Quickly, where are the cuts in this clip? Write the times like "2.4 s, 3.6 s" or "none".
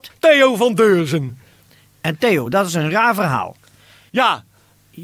none